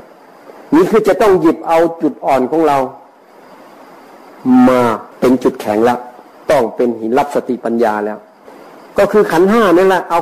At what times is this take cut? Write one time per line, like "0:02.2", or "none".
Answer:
0:05.1

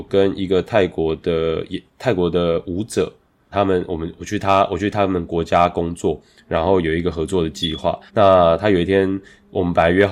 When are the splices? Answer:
0:03.5
0:08.1

